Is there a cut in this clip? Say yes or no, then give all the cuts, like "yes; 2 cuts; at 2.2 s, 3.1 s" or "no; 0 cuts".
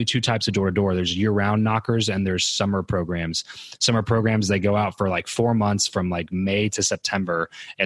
no; 0 cuts